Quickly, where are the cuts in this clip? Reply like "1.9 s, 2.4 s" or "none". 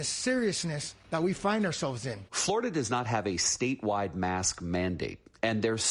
none